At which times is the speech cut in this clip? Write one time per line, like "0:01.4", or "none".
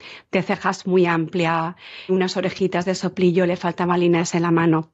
0:02.1

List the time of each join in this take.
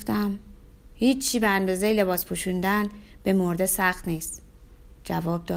none

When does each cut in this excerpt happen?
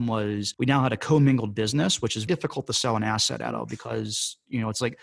0:02.3

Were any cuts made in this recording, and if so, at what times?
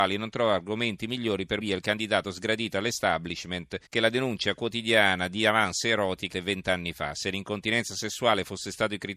0:01.6
0:03.9
0:06.3

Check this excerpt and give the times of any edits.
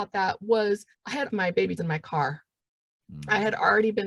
0:00.9
0:01.3
0:01.8

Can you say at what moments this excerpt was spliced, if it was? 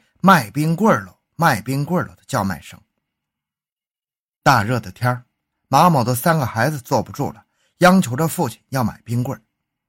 none

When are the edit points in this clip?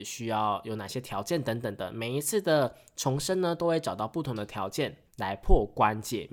0:05.1

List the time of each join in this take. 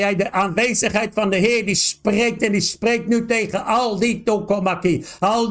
none

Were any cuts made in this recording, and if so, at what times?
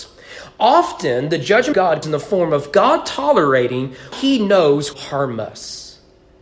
0:01.7
0:02.0
0:04.1
0:04.9

